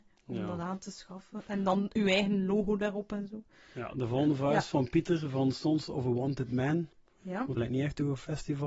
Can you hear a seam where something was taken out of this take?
yes; 1 cut; at 7.6 s

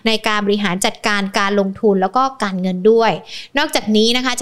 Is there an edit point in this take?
no; 0 cuts

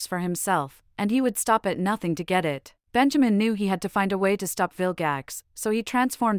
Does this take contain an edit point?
yes; 1 cut; at 2.8 s

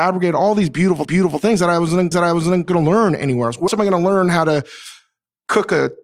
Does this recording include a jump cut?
yes; 3 cuts; at 1.0 s, 2.1 s, 3.7 s

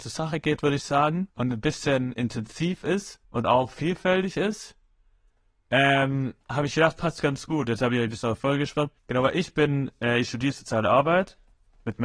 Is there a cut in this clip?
yes; 4 cuts; at 1.3 s, 3.2 s, 6.4 s, 9.0 s

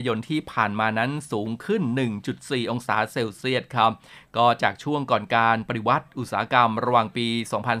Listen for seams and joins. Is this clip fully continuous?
yes; 0 cuts

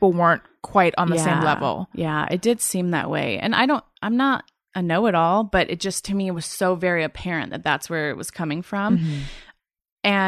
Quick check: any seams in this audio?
no; 0 cuts

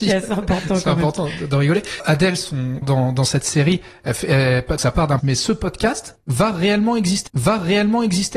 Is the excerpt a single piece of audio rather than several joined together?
no; 4 cuts; at 2.8 s, 4.8 s, 5.2 s, 7.3 s

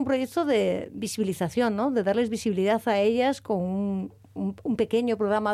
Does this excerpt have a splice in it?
no; 0 cuts

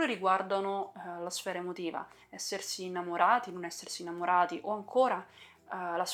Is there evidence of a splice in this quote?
no; 0 cuts

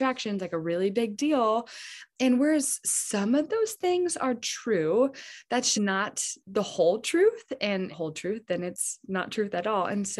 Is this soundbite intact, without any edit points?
no; 3 cuts; at 5.7 s, 6.4 s, 7.9 s

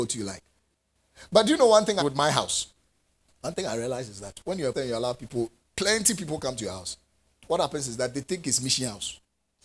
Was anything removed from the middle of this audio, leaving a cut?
yes; 3 cuts; at 2.0 s, 4.7 s, 7.3 s

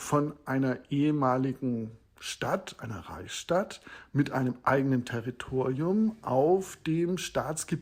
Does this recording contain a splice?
no; 0 cuts

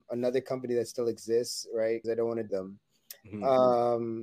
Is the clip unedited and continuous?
no; 2 cuts; at 2.0 s, 2.5 s

